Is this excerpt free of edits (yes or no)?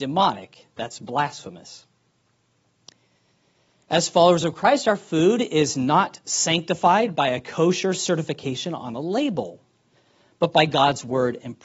yes